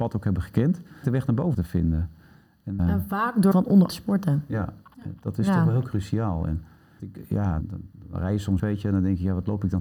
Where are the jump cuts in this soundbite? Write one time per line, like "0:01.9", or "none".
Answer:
0:01.0
0:01.5
0:02.8
0:03.5
0:03.9
0:07.0
0:07.6
0:08.6